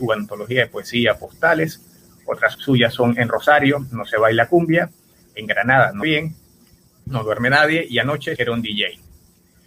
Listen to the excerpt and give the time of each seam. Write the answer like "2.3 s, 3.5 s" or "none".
2.5 s, 6.0 s, 8.4 s